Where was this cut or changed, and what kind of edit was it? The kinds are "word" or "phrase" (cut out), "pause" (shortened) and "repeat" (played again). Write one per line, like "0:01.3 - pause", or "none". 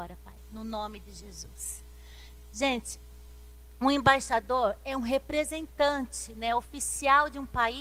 none